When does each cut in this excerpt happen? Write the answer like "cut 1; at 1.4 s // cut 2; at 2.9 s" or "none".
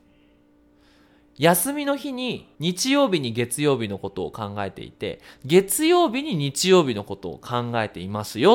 cut 1; at 2.5 s